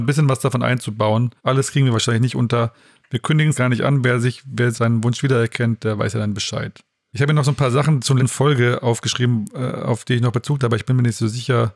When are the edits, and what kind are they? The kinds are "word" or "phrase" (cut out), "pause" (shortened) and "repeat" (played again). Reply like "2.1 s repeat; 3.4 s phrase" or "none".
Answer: 1.4 s pause; 3.5 s word; 4.7 s word; 8.2 s word; 10.6 s phrase